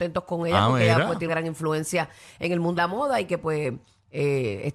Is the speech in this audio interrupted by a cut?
yes; 2 cuts; at 1.3 s, 2.8 s

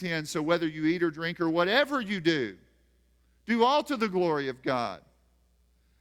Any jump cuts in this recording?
no; 0 cuts

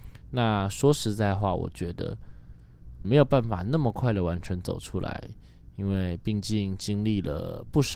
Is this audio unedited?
no; 1 cut; at 3.0 s

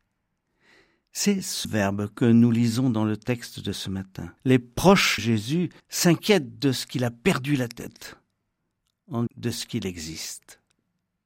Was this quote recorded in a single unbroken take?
no; 5 cuts; at 1.6 s, 4.4 s, 5.2 s, 5.8 s, 9.3 s

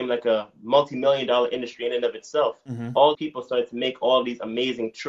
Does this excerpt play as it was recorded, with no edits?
no; 1 cut; at 3.1 s

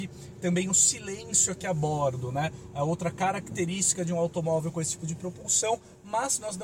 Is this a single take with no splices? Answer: yes; 0 cuts

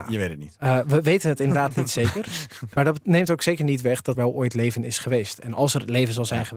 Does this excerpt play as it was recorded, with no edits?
no; 1 cut; at 4.1 s

